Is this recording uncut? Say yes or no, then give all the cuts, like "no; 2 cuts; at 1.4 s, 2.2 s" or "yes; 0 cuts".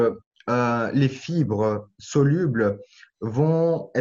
yes; 0 cuts